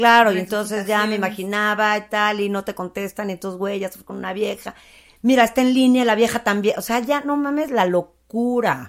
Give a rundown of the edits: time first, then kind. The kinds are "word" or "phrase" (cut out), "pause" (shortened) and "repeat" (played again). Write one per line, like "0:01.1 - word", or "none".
none